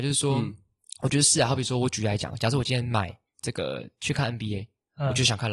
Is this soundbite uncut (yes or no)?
yes